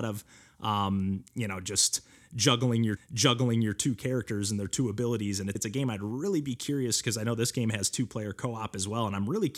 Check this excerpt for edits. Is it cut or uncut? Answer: cut